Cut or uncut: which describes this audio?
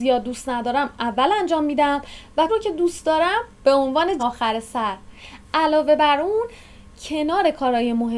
cut